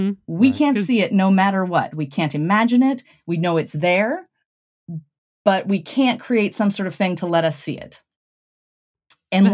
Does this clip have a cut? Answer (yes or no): no